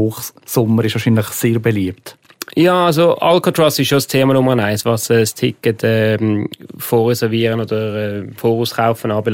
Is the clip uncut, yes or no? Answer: yes